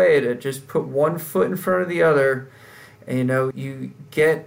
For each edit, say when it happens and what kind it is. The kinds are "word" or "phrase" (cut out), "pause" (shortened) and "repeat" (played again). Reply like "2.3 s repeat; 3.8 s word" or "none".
3.5 s word